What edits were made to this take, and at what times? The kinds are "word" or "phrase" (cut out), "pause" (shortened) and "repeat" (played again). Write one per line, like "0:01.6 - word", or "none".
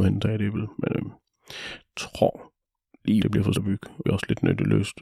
0:03.2 - word
0:03.5 - word
0:04.0 - word